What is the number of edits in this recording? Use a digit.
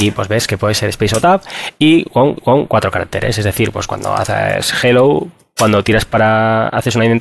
1